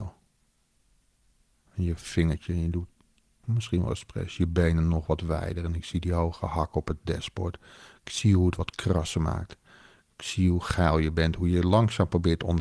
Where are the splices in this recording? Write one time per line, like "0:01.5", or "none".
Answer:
0:03.4